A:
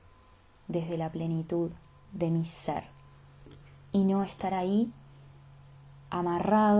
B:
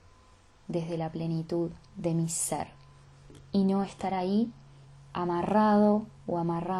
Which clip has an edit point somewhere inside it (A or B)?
B